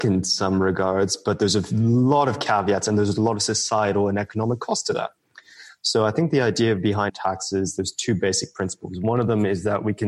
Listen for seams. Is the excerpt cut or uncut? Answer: cut